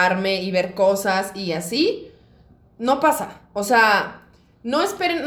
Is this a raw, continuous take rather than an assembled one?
yes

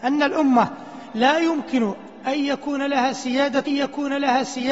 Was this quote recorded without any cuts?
no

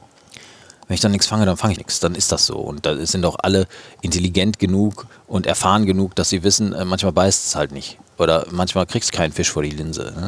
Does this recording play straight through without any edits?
no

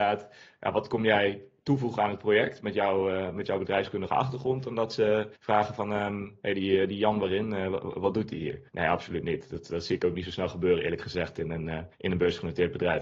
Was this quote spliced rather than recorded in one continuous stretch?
yes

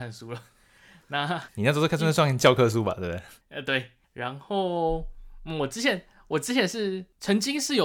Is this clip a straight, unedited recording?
no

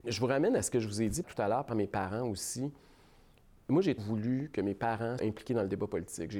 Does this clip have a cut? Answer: yes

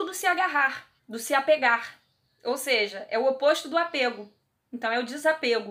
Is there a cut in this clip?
yes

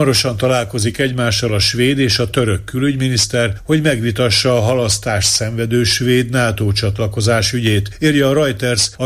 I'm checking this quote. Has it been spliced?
no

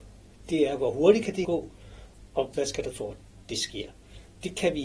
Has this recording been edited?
yes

